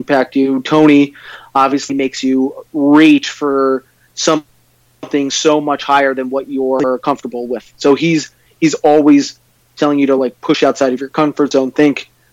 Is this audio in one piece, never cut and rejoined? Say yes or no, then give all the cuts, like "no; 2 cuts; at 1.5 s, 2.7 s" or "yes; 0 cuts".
yes; 0 cuts